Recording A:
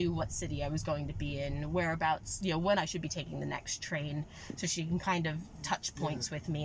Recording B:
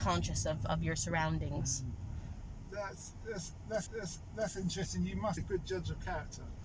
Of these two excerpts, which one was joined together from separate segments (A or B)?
B